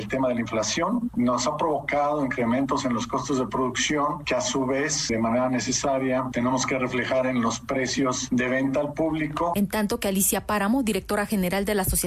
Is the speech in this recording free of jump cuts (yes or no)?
yes